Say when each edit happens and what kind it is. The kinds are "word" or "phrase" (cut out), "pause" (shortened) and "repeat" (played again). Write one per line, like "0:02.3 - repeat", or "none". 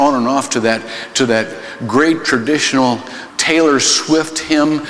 0:03.3 - word